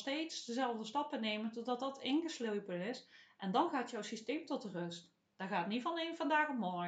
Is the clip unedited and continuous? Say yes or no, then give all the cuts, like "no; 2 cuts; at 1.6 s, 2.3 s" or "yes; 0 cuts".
yes; 0 cuts